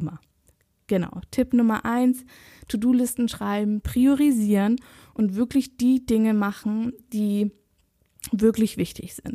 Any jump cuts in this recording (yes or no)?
no